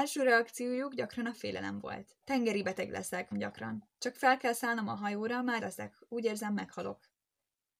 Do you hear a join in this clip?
yes; 4 cuts; at 2.2 s, 3.3 s, 3.9 s, 5.6 s

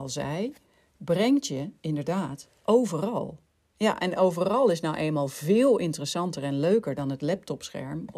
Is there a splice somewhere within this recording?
no; 0 cuts

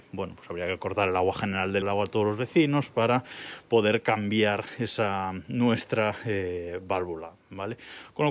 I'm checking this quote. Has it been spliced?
yes; 1 cut; at 1.8 s

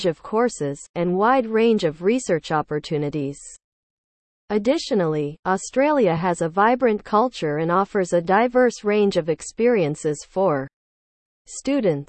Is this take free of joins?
yes; 0 cuts

